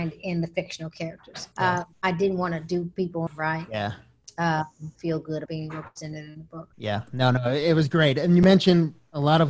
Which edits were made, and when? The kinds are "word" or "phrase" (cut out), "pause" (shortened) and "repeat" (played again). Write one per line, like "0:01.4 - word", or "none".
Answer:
0:01.5 - pause
0:01.9 - pause
0:03.3 - phrase
0:05.0 - phrase
0:05.5 - word
0:06.7 - pause